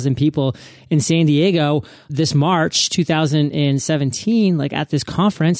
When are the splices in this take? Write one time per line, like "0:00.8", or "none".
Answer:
0:02.1